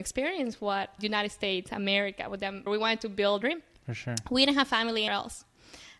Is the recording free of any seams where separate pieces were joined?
no; 4 cuts; at 1.0 s, 2.7 s, 3.4 s, 5.1 s

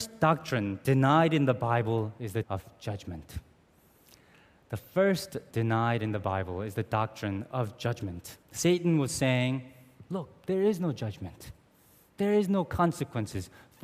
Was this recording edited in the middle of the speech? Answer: yes; 3 cuts; at 2.4 s, 5.5 s, 8.4 s

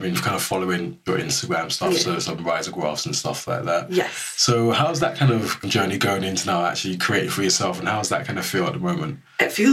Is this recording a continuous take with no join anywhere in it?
no; 1 cut; at 5.6 s

